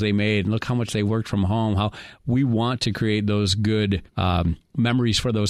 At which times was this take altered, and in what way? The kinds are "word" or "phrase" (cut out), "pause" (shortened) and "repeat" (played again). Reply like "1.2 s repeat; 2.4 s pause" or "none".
4.1 s pause

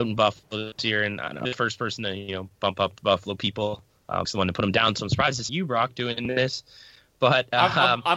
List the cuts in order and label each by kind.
1.4 s word; 4.2 s word; 5.5 s word

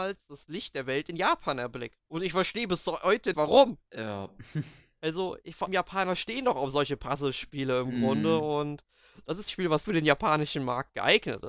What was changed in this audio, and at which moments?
2.0 s pause; 3.3 s word; 3.8 s pause; 5.7 s word; 9.5 s phrase; 9.8 s word

